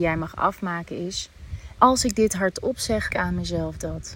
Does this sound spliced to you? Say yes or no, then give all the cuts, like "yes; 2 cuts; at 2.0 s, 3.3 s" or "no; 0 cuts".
yes; 2 cuts; at 1.8 s, 3.1 s